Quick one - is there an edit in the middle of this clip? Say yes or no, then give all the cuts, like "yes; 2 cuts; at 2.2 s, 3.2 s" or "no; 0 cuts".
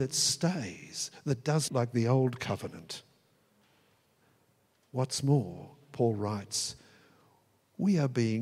yes; 1 cut; at 1.7 s